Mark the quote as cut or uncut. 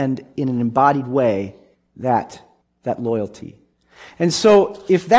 uncut